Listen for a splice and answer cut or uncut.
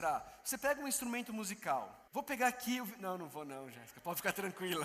cut